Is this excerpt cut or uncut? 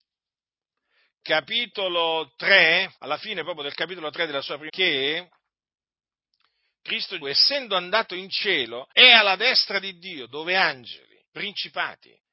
cut